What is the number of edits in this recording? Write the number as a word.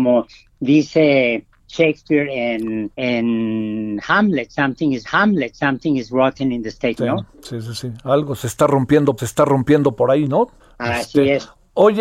five